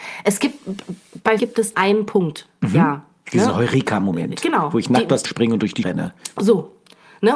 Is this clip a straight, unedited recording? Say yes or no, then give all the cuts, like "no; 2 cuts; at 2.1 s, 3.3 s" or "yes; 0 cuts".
no; 4 cuts; at 1.4 s, 1.7 s, 5.2 s, 5.8 s